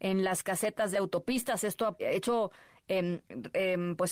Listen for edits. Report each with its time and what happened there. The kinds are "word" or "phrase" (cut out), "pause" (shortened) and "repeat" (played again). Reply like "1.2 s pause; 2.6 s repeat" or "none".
0.9 s phrase; 2.0 s word